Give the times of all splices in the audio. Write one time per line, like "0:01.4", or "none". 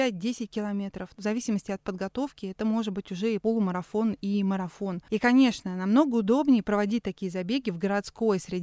none